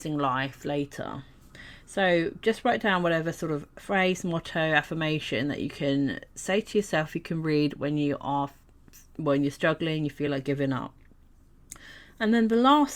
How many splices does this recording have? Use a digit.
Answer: 0